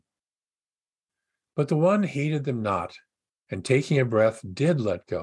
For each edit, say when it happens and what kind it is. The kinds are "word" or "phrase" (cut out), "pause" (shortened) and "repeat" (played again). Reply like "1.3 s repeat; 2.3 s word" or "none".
3.3 s pause